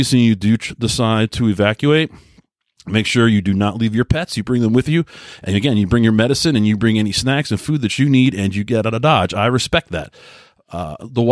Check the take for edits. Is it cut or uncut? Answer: uncut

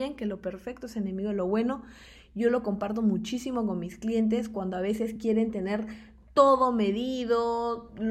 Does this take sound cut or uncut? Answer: uncut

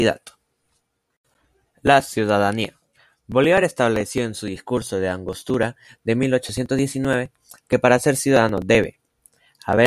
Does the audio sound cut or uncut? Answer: uncut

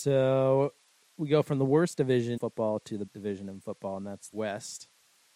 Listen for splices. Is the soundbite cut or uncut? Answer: cut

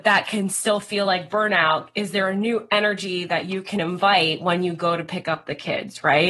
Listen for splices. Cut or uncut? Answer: uncut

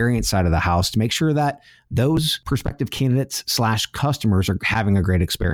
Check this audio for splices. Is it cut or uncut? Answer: uncut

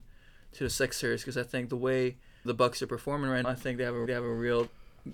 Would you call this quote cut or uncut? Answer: cut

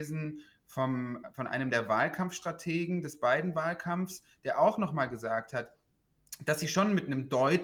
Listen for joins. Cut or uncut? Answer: uncut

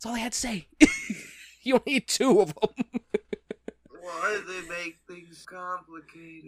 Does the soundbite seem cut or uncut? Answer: cut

